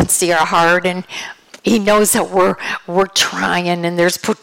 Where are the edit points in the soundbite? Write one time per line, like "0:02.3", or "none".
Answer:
0:01.6